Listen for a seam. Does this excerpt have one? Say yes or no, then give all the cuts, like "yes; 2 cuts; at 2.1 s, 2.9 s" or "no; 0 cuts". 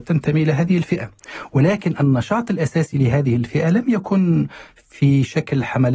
no; 0 cuts